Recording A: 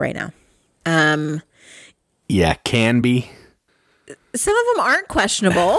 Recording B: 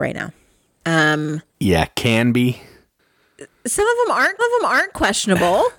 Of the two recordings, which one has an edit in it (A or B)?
B